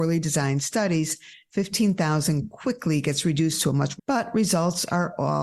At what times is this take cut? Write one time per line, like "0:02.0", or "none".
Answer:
0:04.0